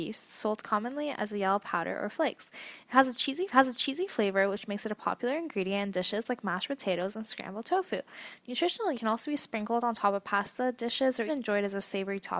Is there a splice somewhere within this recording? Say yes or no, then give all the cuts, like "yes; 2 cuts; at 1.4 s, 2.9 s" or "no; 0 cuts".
yes; 3 cuts; at 3.5 s, 8.9 s, 11.3 s